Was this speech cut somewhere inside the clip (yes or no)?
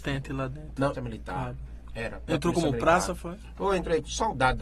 yes